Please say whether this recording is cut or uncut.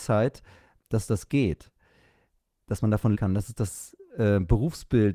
cut